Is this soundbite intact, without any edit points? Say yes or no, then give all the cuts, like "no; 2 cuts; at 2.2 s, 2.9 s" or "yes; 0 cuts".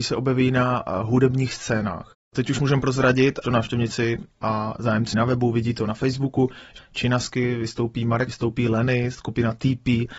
no; 4 cuts; at 3.4 s, 5.1 s, 6.8 s, 8.3 s